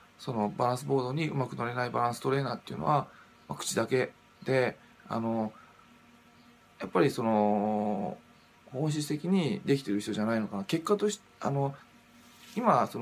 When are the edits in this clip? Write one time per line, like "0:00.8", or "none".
none

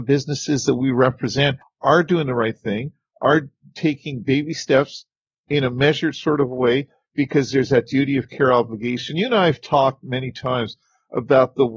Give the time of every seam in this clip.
none

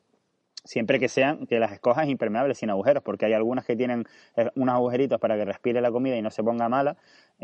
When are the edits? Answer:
0:01.5

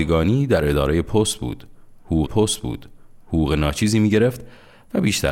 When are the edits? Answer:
0:02.2

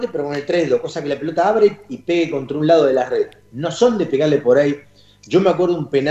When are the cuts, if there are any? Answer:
none

